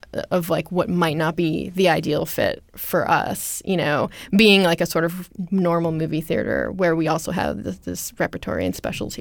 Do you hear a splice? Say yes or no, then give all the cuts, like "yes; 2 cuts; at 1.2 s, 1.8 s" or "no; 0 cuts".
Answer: no; 0 cuts